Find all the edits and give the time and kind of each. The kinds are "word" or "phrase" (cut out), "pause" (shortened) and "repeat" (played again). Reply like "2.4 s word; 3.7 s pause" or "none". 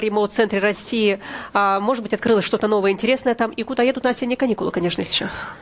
none